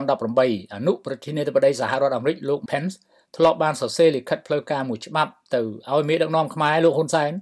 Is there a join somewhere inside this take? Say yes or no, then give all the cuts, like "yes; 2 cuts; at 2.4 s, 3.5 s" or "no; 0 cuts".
yes; 1 cut; at 2.7 s